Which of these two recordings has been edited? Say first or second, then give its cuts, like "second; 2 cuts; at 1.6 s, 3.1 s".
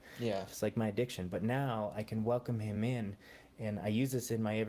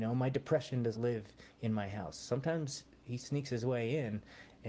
second; 1 cut; at 0.9 s